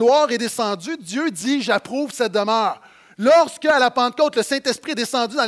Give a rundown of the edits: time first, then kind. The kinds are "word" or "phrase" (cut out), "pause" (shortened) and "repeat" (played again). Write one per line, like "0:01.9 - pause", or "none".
none